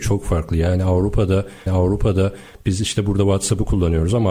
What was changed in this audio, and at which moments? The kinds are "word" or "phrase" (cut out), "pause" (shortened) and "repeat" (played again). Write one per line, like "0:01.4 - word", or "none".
0:01.7 - repeat